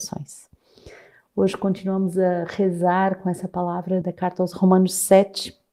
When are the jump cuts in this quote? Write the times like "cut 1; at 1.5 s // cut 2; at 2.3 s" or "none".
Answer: cut 1; at 4.0 s // cut 2; at 4.5 s